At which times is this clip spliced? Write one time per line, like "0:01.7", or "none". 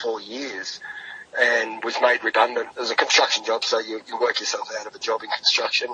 none